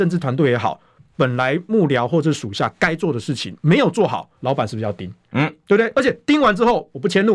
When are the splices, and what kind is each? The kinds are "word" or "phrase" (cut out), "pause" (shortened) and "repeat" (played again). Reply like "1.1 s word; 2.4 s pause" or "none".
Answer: 4.4 s pause